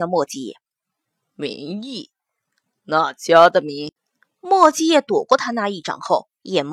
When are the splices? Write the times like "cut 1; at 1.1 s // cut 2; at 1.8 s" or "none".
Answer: none